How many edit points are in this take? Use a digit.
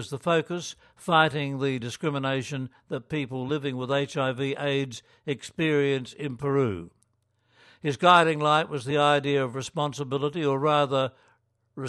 0